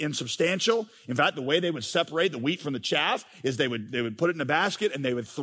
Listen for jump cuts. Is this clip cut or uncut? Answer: uncut